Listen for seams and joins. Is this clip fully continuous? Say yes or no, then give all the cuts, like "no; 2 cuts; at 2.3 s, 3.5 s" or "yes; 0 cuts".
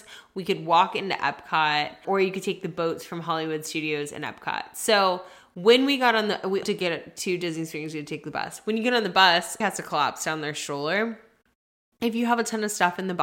no; 3 cuts; at 2.0 s, 6.6 s, 9.6 s